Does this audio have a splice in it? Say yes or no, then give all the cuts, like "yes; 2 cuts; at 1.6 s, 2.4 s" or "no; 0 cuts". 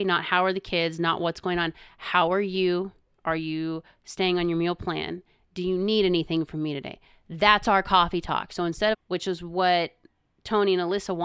yes; 1 cut; at 8.9 s